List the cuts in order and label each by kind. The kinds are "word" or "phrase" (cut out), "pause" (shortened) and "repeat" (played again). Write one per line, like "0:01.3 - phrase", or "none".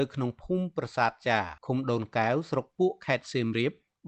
0:01.6 - pause